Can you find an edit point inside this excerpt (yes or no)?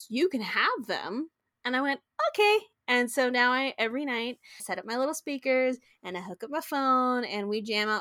yes